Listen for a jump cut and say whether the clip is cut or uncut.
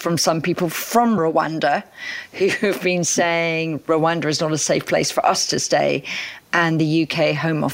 uncut